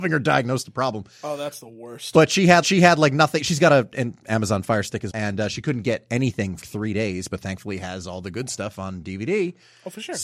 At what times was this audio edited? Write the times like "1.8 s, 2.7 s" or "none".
2.6 s, 5.1 s, 6.6 s